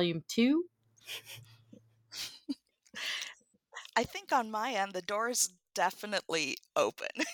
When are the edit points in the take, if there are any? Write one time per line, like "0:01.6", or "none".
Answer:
none